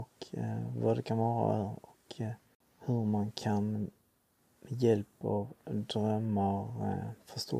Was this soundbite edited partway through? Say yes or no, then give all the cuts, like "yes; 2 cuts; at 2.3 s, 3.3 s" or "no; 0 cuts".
no; 0 cuts